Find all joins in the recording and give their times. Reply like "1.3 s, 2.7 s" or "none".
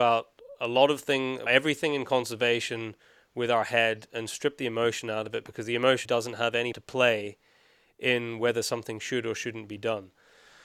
1.5 s, 6.1 s, 6.7 s